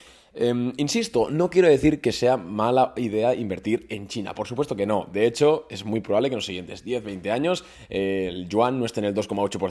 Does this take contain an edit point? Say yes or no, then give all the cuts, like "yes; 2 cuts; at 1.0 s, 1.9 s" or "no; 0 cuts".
no; 0 cuts